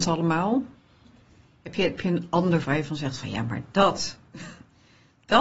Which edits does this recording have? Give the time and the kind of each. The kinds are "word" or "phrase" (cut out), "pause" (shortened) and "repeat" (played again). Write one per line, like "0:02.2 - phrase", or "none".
0:02.0 - word
0:02.6 - word
0:03.2 - word